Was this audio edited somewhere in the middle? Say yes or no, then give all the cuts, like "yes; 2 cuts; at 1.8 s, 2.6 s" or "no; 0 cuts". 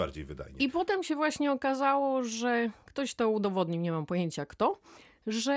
no; 0 cuts